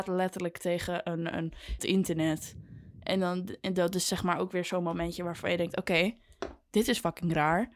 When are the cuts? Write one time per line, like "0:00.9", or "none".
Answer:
0:01.8